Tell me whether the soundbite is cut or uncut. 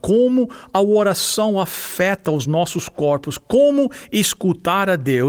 uncut